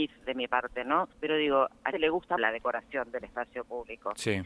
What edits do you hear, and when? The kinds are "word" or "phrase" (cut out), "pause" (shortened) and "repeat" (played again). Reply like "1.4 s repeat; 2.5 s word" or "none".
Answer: 1.1 s pause; 1.9 s word; 2.4 s word